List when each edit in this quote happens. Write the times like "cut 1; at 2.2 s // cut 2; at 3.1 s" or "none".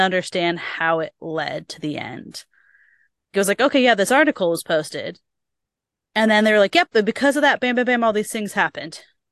cut 1; at 3.3 s